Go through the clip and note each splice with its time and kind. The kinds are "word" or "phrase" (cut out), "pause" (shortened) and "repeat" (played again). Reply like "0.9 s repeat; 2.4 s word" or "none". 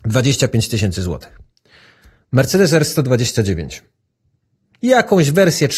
none